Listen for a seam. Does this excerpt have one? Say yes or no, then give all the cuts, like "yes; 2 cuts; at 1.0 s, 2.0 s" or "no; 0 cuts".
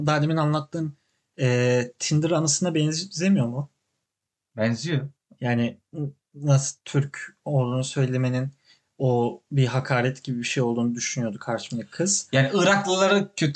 no; 0 cuts